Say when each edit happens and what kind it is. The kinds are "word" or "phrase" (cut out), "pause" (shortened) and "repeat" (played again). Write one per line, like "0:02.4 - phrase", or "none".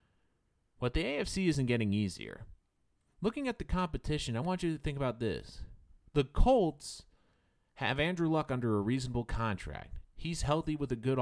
none